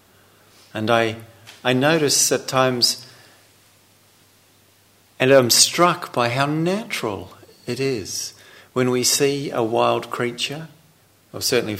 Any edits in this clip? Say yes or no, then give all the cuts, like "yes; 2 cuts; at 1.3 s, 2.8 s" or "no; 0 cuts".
no; 0 cuts